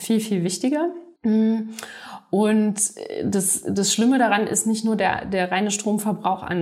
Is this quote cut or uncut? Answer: cut